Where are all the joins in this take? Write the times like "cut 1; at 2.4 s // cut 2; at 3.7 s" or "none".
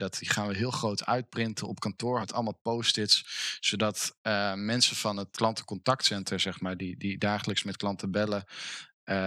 cut 1; at 2.2 s // cut 2; at 5.3 s